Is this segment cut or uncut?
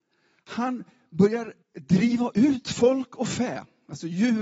cut